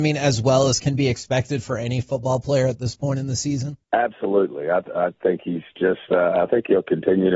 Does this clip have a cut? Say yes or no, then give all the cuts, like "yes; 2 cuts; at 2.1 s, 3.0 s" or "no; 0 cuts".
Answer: yes; 1 cut; at 3.8 s